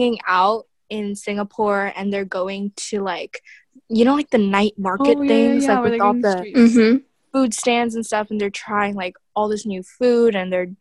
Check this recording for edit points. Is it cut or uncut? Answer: uncut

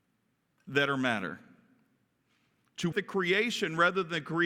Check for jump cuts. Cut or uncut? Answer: cut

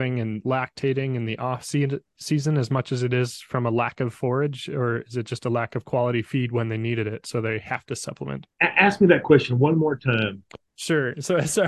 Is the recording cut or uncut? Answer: cut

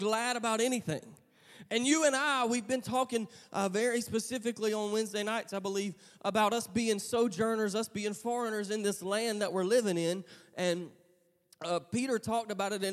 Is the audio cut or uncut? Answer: uncut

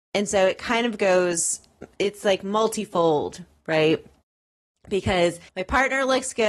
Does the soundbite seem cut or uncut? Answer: cut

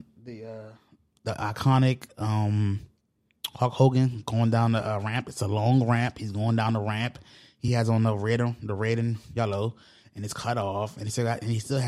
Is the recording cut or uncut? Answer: uncut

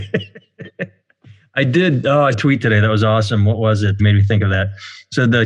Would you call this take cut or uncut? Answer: cut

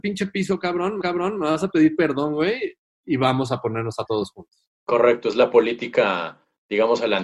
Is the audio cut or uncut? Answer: cut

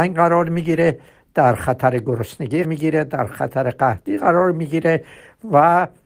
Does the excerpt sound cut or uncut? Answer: cut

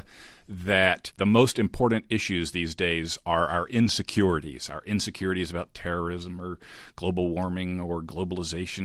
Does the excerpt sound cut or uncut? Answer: uncut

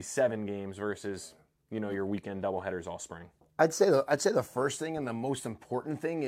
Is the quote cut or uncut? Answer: uncut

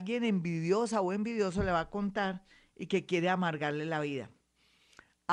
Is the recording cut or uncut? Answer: uncut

